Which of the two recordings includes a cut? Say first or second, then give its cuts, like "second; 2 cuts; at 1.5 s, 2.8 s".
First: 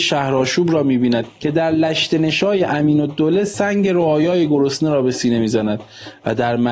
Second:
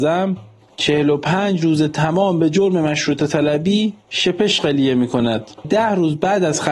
second; 1 cut; at 5.6 s